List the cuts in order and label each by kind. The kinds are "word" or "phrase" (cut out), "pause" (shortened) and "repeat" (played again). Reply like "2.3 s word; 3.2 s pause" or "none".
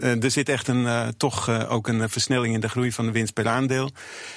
none